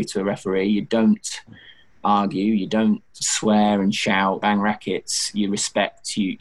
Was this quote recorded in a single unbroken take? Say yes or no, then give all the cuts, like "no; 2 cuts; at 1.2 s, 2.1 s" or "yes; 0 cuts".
no; 2 cuts; at 3.2 s, 4.4 s